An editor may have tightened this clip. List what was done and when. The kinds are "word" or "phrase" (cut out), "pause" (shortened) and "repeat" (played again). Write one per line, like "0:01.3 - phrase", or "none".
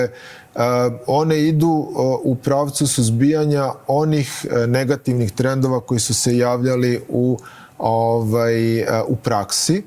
none